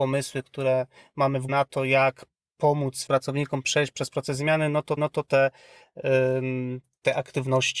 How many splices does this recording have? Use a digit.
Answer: 3